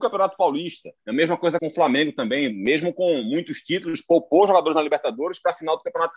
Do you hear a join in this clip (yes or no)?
yes